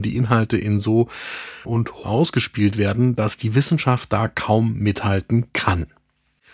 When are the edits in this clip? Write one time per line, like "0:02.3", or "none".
0:01.6
0:02.0

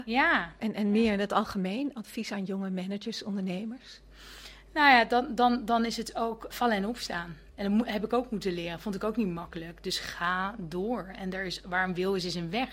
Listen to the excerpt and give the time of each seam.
0:06.5

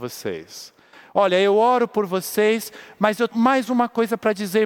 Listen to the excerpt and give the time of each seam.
0:03.3

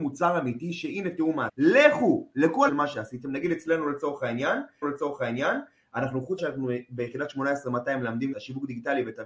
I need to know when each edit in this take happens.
0:01.5
0:02.7
0:04.8
0:06.4
0:08.3

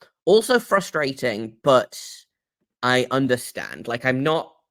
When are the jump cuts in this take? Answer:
none

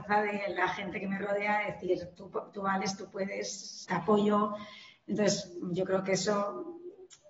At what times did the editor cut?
0:03.8

